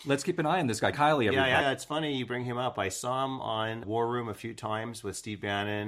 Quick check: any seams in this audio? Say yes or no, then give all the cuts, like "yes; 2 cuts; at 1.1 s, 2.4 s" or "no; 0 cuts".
yes; 3 cuts; at 0.9 s, 1.6 s, 3.8 s